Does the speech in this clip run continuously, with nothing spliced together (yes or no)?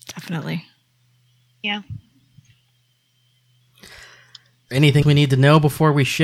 no